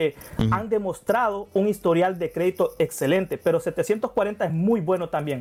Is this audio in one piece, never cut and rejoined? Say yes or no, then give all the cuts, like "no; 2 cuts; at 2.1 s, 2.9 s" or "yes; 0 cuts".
yes; 0 cuts